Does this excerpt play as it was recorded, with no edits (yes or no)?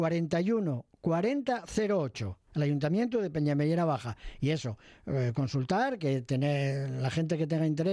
no